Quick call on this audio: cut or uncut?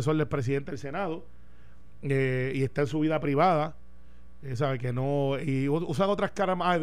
uncut